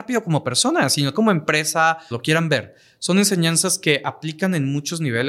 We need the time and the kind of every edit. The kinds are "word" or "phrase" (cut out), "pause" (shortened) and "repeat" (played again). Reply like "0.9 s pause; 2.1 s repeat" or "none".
1.1 s word; 2.1 s phrase